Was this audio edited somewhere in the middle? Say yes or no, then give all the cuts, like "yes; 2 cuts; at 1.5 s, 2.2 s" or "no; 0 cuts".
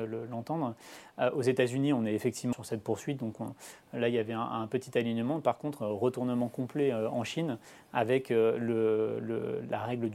yes; 1 cut; at 2.5 s